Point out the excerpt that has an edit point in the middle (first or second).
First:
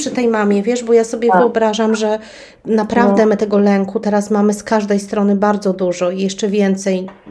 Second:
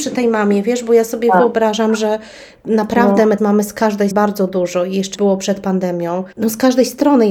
second